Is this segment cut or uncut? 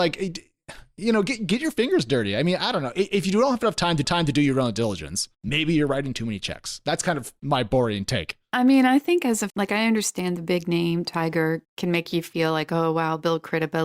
cut